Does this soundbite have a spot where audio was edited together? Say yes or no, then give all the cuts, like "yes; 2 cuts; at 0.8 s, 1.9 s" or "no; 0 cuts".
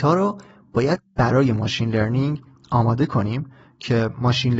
no; 0 cuts